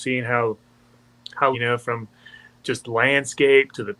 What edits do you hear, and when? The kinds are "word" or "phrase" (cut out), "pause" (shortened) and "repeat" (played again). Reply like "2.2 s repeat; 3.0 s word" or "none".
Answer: 1.5 s phrase; 2.6 s word